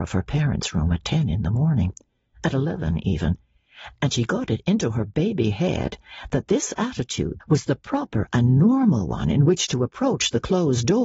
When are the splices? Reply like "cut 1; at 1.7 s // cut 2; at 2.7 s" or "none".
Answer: cut 1; at 7.4 s